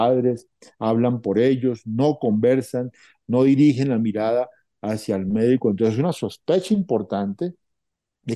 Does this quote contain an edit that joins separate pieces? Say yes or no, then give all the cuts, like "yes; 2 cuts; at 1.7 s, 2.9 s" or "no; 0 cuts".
no; 0 cuts